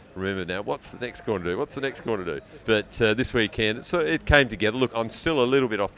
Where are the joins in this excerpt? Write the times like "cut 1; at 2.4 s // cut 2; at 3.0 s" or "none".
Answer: cut 1; at 2.6 s // cut 2; at 4.9 s